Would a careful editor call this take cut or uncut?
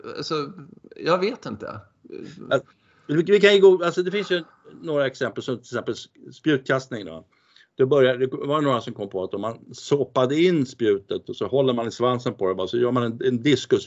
uncut